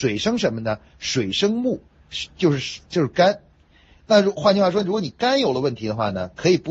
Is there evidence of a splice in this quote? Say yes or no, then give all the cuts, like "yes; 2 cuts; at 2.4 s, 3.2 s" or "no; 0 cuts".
no; 0 cuts